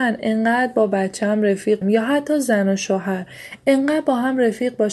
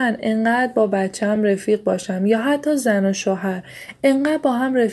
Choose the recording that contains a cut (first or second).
first